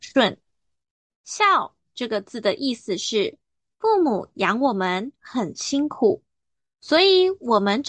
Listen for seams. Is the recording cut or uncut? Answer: uncut